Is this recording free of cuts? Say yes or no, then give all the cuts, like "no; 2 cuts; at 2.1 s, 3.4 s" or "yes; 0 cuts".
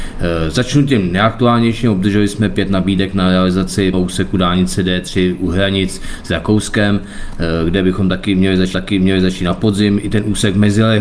no; 2 cuts; at 3.9 s, 8.7 s